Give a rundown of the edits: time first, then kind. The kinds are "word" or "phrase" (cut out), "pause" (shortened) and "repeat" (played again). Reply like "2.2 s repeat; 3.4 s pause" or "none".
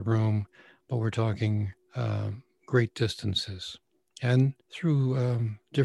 1.8 s pause; 4.6 s pause